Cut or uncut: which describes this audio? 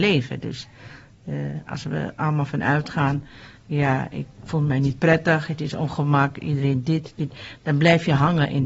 uncut